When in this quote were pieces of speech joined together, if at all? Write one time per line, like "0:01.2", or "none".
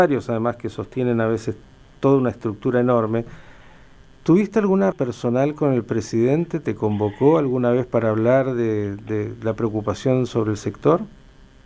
0:04.9